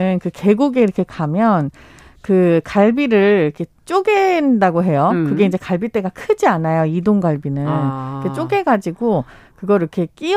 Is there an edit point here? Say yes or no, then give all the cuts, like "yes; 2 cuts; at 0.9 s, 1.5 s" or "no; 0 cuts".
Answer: no; 0 cuts